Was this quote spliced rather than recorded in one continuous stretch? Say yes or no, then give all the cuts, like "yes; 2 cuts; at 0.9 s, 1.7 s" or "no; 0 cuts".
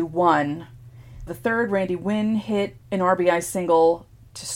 yes; 2 cuts; at 1.3 s, 2.8 s